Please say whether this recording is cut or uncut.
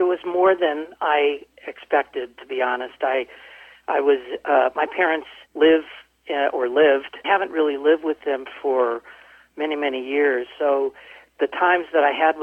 cut